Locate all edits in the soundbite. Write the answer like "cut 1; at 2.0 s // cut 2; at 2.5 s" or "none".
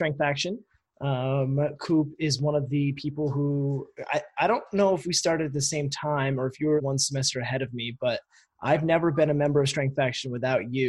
cut 1; at 6.8 s